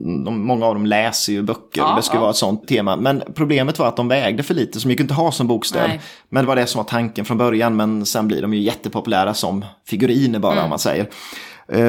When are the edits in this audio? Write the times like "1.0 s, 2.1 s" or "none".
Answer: 2.6 s